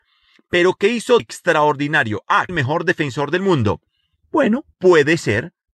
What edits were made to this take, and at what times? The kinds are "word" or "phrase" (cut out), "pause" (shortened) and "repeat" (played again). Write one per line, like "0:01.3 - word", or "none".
0:01.2 - word
0:02.5 - phrase
0:04.7 - pause